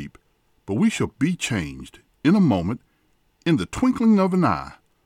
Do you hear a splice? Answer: no; 0 cuts

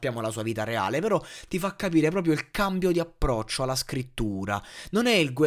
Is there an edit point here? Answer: no; 0 cuts

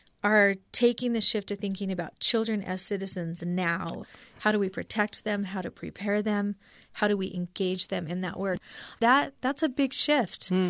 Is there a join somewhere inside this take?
no; 0 cuts

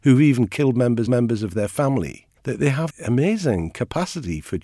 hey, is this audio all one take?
no; 3 cuts; at 1.1 s, 2.4 s, 2.9 s

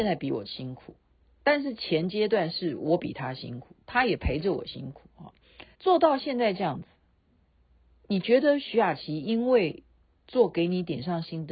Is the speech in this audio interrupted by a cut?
yes; 1 cut; at 5.7 s

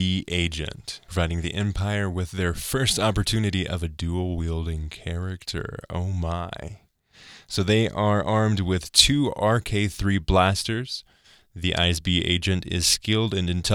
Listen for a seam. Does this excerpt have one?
no; 0 cuts

